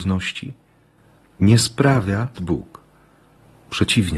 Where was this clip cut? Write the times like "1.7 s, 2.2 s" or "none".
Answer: 2.3 s